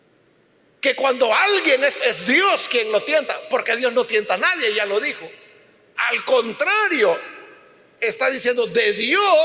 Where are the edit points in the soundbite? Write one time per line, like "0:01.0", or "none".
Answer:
0:02.0